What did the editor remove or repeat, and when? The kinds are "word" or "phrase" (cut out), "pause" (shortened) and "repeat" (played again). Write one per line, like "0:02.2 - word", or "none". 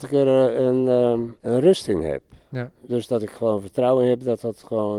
0:01.4 - pause